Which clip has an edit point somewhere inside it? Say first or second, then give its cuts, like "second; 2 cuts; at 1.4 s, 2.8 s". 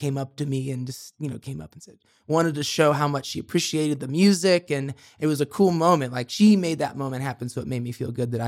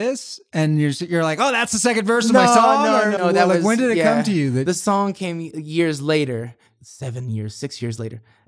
second; 1 cut; at 3.2 s